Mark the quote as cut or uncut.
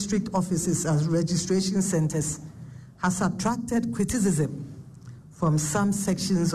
uncut